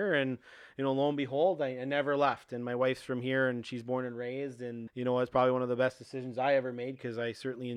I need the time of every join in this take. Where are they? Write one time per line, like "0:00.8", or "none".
0:04.9